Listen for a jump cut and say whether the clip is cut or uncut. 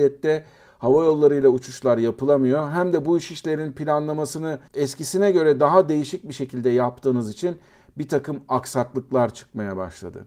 cut